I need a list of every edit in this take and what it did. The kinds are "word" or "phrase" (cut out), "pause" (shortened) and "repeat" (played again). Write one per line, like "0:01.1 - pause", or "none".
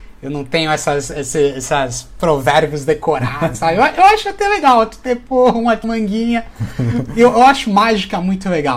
0:03.5 - word
0:05.8 - word